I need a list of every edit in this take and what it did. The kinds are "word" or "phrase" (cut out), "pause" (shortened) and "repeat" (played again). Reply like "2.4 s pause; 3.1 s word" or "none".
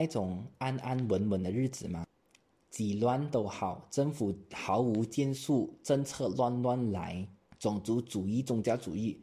none